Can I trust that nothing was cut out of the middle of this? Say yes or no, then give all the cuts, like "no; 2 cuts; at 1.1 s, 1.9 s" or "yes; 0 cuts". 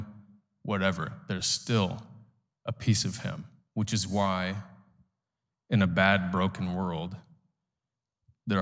yes; 0 cuts